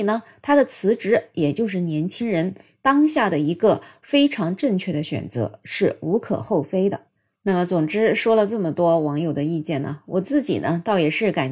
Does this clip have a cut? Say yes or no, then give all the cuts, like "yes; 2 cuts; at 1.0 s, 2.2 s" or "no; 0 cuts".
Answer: no; 0 cuts